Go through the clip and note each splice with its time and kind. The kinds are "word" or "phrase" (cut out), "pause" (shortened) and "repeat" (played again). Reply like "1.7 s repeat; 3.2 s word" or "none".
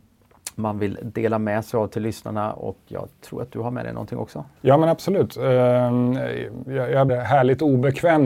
4.6 s pause; 7.1 s phrase